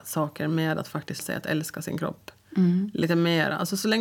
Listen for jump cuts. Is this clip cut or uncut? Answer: cut